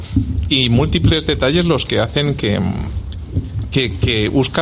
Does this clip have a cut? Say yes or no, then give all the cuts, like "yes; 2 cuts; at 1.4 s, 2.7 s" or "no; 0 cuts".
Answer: no; 0 cuts